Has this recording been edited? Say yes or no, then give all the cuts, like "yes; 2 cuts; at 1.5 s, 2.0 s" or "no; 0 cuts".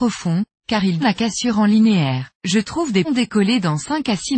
yes; 3 cuts; at 1.0 s, 2.3 s, 3.0 s